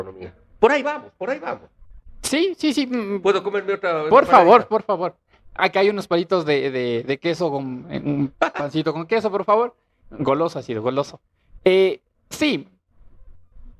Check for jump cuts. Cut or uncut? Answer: uncut